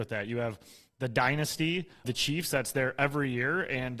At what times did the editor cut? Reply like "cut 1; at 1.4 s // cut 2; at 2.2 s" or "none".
cut 1; at 2.0 s